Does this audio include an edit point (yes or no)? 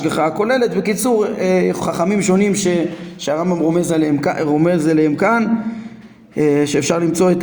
yes